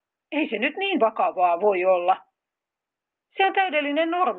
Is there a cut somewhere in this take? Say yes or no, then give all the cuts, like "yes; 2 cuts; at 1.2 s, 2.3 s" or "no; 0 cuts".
no; 0 cuts